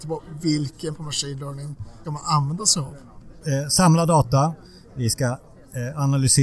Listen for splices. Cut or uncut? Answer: cut